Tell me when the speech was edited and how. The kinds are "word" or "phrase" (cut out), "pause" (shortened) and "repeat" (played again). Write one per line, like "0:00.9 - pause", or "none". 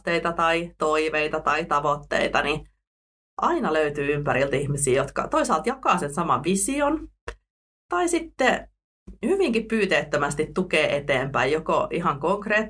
none